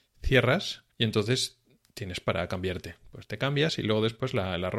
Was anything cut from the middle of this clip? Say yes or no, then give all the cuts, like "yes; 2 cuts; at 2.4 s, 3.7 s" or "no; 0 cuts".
yes; 1 cut; at 0.9 s